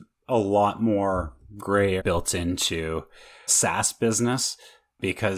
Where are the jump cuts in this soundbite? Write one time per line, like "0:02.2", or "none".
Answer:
0:02.0
0:03.5